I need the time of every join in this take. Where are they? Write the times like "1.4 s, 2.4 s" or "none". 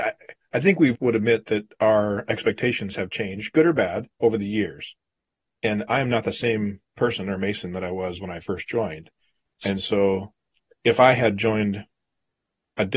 0.9 s, 4.1 s, 10.5 s